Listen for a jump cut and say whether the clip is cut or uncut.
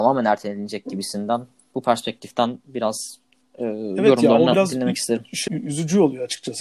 cut